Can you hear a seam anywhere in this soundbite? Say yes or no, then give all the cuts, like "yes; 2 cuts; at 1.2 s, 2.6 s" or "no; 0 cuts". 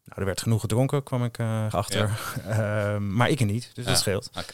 yes; 1 cut; at 1.7 s